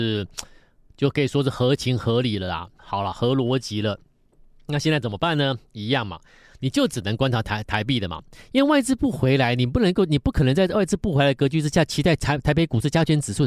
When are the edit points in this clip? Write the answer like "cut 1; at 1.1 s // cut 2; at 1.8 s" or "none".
cut 1; at 2.8 s